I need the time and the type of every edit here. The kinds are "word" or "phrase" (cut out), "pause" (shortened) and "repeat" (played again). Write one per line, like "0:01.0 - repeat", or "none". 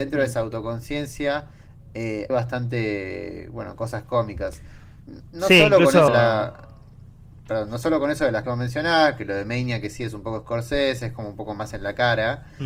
0:02.3 - word
0:06.1 - word
0:08.4 - word